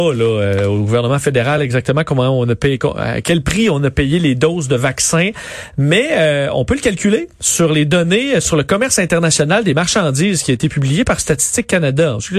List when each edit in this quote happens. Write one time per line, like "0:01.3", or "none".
none